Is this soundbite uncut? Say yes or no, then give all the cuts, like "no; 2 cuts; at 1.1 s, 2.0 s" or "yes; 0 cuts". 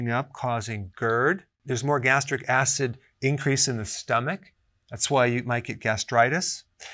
yes; 0 cuts